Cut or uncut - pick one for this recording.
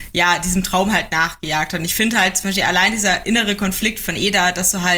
uncut